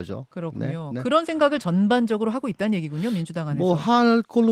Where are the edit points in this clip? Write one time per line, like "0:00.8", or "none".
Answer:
none